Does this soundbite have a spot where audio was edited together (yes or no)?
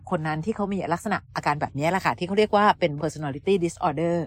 yes